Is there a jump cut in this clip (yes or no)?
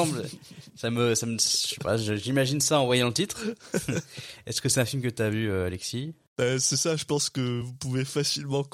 no